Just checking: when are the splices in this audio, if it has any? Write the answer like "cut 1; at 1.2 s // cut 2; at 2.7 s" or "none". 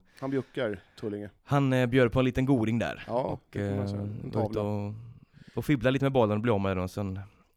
cut 1; at 1.4 s